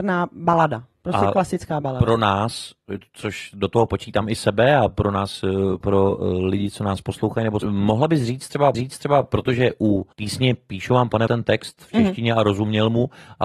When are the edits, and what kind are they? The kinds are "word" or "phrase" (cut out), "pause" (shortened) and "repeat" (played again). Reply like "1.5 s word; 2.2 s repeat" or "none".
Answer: 5.8 s word; 7.6 s word; 8.7 s repeat; 10.1 s pause; 11.3 s phrase